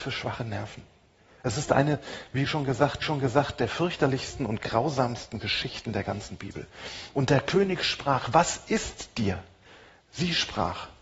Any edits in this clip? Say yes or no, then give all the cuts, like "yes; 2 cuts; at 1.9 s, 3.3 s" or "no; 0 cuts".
yes; 1 cut; at 3.0 s